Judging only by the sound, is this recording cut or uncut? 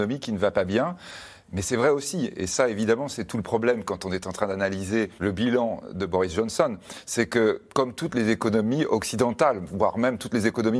cut